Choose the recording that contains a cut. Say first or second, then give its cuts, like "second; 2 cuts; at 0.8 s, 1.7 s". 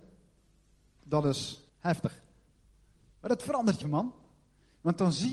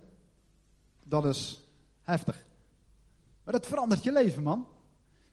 first; 2 cuts; at 1.7 s, 3.8 s